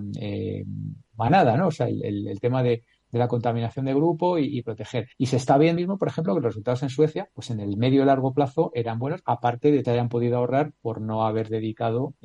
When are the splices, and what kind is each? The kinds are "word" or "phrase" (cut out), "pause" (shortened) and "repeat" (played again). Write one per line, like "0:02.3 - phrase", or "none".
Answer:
0:05.1 - pause
0:05.8 - word
0:07.3 - pause
0:09.8 - phrase